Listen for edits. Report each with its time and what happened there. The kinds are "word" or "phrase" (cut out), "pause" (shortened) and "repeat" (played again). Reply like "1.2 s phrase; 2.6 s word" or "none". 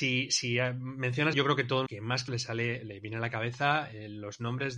1.3 s word; 1.9 s word; 2.3 s word